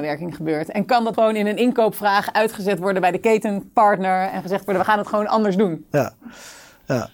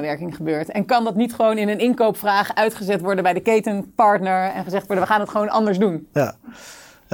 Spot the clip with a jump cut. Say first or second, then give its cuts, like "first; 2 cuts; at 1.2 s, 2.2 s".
first; 1 cut; at 1.1 s